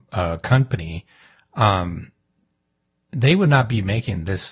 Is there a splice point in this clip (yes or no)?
no